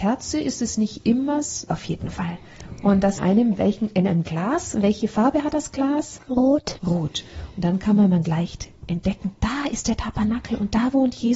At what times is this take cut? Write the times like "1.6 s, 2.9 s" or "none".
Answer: 1.7 s, 3.2 s, 8.2 s, 8.8 s